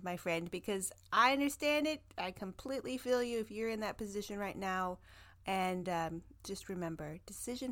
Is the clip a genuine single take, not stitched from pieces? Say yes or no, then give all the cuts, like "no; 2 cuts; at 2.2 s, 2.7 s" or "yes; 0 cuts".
yes; 0 cuts